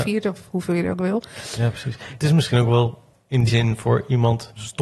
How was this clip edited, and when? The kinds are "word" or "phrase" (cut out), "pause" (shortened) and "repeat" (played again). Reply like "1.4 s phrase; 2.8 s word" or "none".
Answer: 3.5 s word